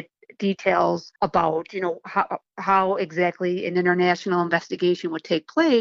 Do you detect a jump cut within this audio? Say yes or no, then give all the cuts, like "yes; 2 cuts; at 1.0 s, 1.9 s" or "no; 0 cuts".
yes; 1 cut; at 1.2 s